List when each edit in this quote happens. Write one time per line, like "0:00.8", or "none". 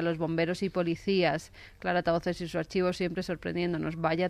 none